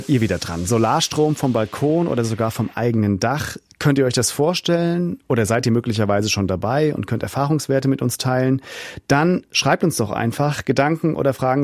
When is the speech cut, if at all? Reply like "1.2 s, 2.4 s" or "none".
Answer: none